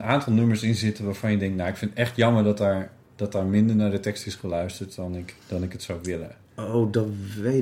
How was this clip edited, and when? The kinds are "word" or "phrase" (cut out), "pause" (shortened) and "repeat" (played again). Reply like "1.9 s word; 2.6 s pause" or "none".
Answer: 5.4 s pause